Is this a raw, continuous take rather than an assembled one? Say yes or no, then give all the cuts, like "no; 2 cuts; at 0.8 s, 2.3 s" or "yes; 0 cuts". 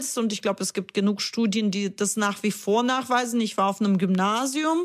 yes; 0 cuts